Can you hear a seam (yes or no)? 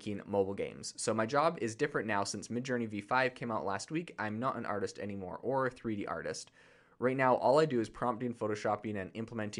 no